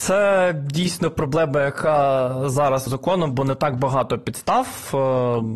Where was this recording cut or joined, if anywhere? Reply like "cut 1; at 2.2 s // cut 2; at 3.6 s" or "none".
cut 1; at 2.9 s